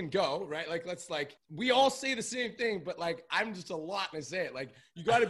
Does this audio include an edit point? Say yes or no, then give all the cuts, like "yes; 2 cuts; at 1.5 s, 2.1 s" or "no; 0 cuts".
yes; 1 cut; at 4.1 s